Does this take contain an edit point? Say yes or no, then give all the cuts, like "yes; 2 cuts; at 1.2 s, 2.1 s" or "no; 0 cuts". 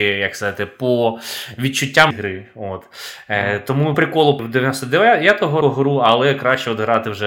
yes; 4 cuts; at 2.1 s, 3.9 s, 4.4 s, 5.6 s